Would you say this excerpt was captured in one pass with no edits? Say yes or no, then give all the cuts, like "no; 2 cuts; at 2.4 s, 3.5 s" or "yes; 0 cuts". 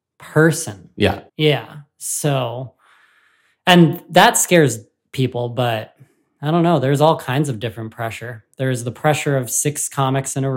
no; 1 cut; at 1.3 s